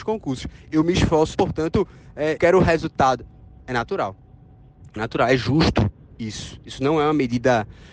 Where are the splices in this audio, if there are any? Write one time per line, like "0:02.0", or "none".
0:01.3
0:02.4
0:05.0

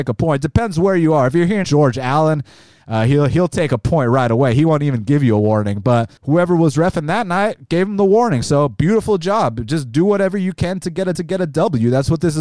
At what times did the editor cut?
0:01.6
0:06.2
0:11.1

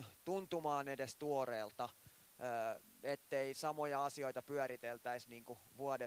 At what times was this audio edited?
none

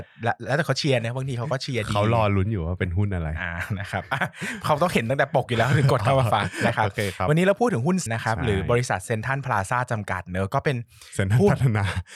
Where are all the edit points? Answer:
0:08.1

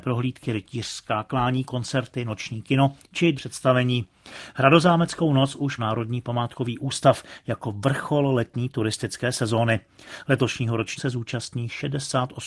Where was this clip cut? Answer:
0:03.3
0:05.8
0:11.0

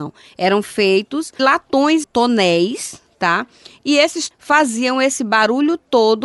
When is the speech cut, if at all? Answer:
0:01.4
0:02.0
0:04.3

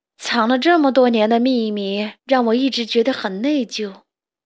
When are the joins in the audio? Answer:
0:02.2

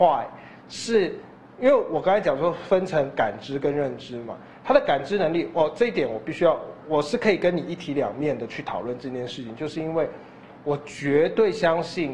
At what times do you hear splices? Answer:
none

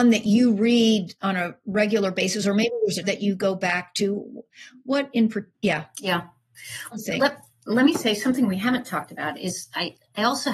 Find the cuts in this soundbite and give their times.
0:03.0
0:05.5
0:06.9

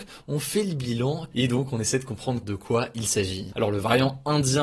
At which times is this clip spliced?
0:01.3
0:02.4

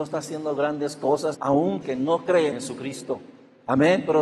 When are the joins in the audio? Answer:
0:01.3
0:01.8
0:02.5

